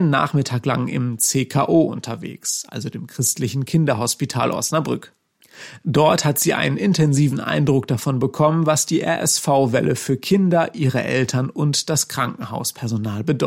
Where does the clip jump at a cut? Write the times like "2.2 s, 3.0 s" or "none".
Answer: none